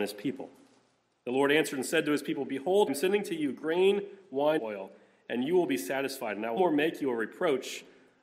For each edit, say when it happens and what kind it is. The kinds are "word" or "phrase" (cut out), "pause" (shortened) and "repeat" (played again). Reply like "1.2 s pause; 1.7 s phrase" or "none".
2.9 s word; 4.6 s word; 6.6 s word